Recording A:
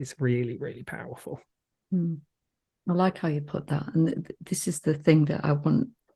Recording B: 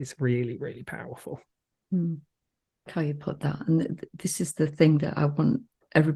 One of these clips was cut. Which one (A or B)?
B